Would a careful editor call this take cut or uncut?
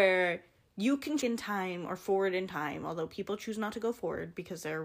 cut